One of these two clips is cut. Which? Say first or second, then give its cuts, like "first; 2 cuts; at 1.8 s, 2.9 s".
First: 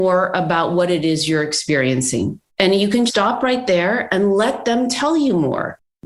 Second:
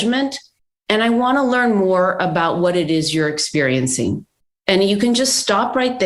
first; 2 cuts; at 2.5 s, 3.1 s